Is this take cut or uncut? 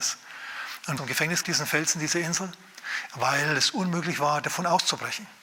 cut